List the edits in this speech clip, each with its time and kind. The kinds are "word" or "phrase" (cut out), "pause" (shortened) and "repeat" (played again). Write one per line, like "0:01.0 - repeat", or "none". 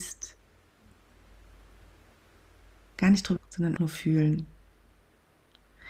0:03.4 - word
0:03.8 - word